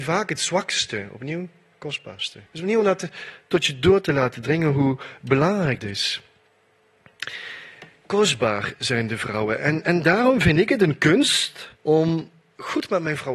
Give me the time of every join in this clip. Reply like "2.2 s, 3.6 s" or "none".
2.5 s, 5.8 s, 11.8 s

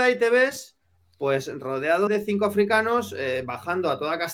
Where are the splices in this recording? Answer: 2.1 s

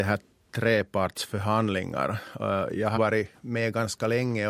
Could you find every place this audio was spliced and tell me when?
3.0 s

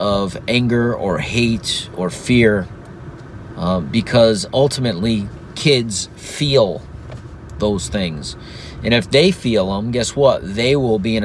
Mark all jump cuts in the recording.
none

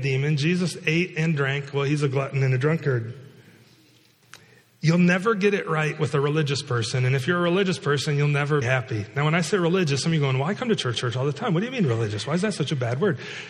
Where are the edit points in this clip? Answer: 8.6 s, 10.9 s

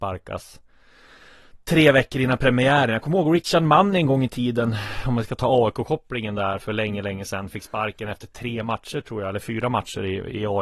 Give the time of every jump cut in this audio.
none

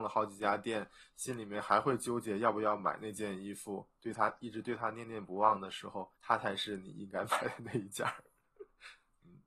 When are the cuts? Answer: 6.2 s

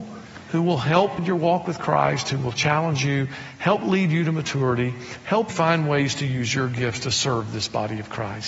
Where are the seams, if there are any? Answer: 1.2 s, 5.5 s

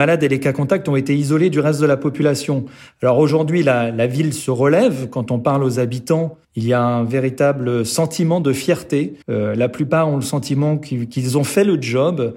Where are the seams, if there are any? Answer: 6.4 s, 9.2 s

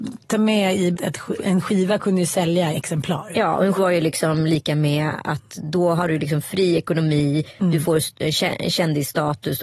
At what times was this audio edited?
0.9 s, 1.4 s, 2.7 s, 3.8 s

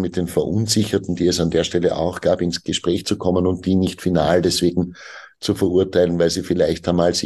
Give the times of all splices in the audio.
none

